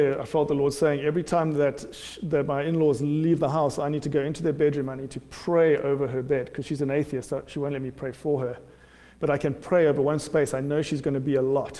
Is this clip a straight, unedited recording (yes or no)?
yes